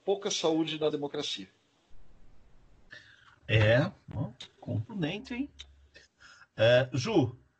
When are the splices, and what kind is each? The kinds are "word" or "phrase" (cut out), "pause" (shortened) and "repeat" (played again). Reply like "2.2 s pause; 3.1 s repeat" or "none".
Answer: 0.9 s word; 4.0 s pause